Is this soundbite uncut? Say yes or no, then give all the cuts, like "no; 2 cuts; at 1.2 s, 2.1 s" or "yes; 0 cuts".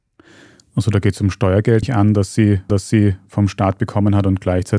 no; 2 cuts; at 1.8 s, 2.7 s